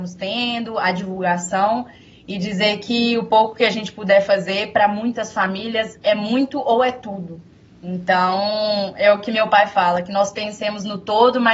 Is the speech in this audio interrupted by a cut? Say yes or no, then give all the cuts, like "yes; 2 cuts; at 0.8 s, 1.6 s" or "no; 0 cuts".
no; 0 cuts